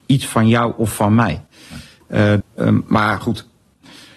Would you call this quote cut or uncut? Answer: cut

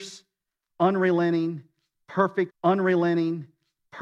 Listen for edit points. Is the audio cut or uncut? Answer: cut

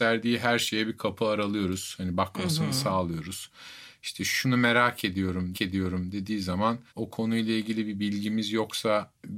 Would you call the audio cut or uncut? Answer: cut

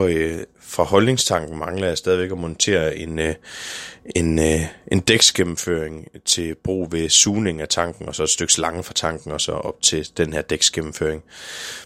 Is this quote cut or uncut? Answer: uncut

